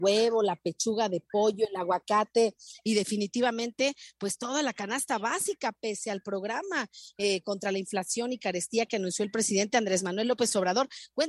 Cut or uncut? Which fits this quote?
uncut